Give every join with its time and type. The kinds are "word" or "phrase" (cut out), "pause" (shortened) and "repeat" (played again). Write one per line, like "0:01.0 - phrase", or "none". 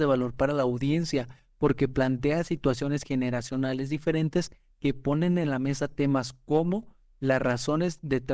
none